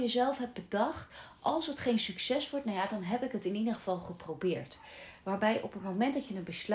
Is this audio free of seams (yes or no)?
yes